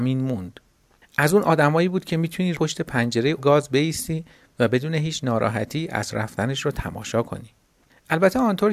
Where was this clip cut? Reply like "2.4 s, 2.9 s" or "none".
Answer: 2.5 s, 3.4 s, 6.1 s